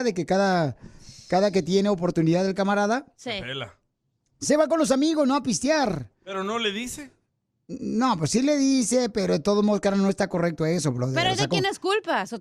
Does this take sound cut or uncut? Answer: uncut